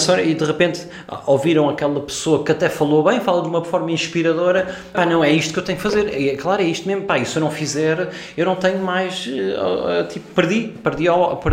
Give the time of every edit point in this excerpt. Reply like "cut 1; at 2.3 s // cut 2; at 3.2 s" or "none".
cut 1; at 4.9 s